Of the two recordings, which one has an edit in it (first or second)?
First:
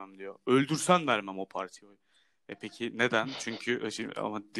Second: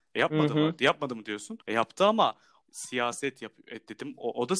second